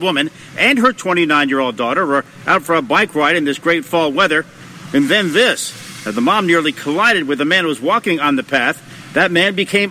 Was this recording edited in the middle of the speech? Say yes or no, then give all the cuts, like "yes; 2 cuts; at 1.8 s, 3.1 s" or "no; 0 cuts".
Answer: no; 0 cuts